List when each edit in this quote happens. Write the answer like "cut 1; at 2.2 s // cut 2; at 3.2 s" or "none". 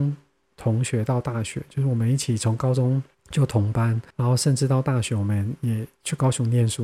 cut 1; at 3.1 s // cut 2; at 4.1 s